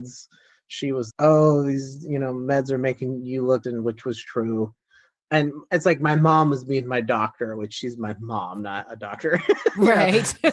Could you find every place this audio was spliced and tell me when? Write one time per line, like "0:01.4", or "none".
0:01.1
0:03.6